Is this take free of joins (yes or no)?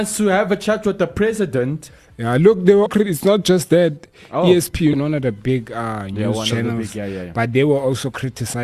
no